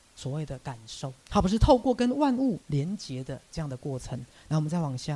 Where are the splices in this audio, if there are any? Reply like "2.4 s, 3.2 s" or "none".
1.2 s, 2.6 s